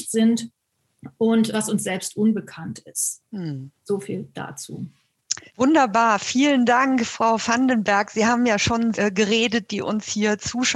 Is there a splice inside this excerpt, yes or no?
yes